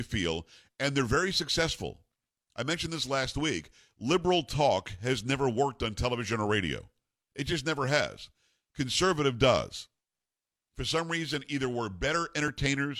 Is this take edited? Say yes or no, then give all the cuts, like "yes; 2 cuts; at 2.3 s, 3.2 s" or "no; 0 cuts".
no; 0 cuts